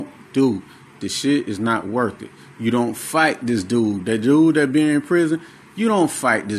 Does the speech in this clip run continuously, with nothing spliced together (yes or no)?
yes